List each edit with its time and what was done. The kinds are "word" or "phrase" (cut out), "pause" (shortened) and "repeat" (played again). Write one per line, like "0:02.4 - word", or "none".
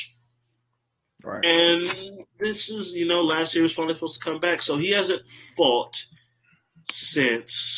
none